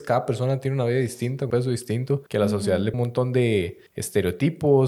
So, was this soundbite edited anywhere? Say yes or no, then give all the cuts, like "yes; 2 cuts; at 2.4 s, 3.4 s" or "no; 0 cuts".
yes; 4 cuts; at 1.5 s, 2.3 s, 2.9 s, 3.9 s